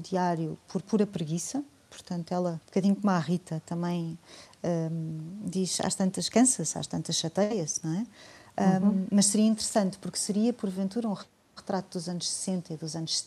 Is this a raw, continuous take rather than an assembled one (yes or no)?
no